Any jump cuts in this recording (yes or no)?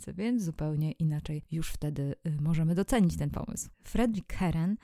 yes